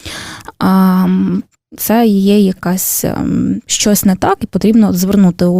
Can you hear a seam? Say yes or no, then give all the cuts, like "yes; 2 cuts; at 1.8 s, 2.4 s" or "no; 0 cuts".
yes; 2 cuts; at 1.7 s, 3.6 s